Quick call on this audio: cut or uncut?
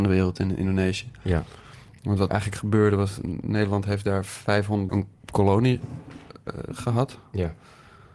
cut